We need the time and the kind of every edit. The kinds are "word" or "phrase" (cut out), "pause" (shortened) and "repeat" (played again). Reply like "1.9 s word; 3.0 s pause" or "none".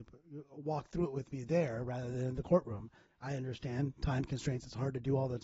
none